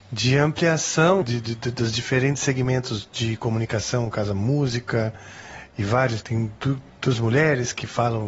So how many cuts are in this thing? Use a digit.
2